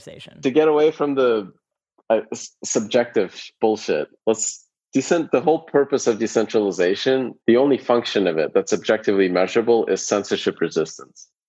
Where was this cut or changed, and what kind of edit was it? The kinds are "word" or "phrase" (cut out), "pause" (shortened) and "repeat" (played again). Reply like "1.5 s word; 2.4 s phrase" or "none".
4.2 s pause; 7.4 s pause